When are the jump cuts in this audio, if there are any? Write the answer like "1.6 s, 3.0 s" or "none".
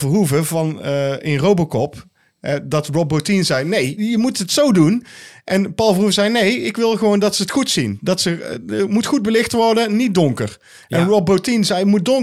none